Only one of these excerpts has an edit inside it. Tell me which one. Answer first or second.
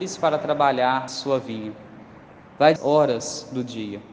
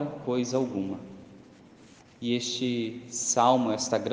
first